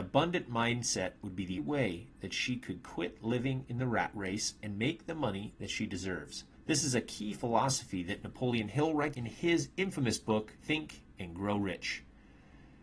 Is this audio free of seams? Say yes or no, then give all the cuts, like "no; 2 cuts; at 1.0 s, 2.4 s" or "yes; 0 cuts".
no; 4 cuts; at 1.6 s, 6.6 s, 9.1 s, 10.6 s